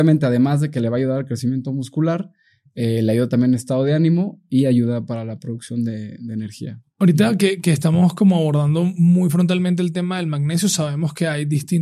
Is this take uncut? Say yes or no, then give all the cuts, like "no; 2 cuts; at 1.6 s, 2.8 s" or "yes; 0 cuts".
yes; 0 cuts